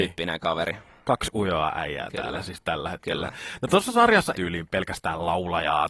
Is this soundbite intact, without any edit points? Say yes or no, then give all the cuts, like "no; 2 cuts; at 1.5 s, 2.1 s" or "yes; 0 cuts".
no; 1 cut; at 4.3 s